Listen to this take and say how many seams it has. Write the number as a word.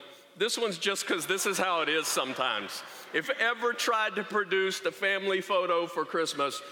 one